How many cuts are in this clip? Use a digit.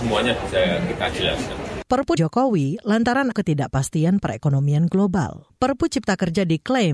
2